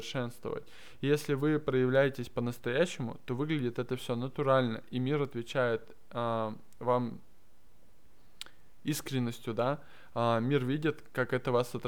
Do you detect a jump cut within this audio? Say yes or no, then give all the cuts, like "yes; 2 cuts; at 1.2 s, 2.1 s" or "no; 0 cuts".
no; 0 cuts